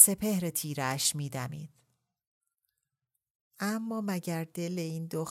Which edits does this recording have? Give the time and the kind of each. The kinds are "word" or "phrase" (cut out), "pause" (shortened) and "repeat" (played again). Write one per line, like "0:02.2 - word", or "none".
none